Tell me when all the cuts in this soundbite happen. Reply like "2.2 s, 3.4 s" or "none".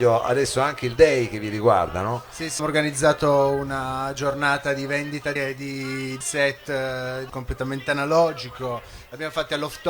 1.0 s, 2.6 s, 5.4 s, 6.2 s, 7.3 s